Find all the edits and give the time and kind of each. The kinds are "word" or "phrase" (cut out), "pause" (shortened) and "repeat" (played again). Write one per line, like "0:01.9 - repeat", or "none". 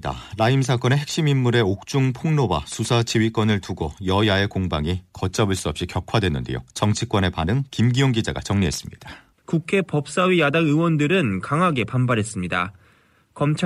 0:06.7 - pause
0:09.3 - pause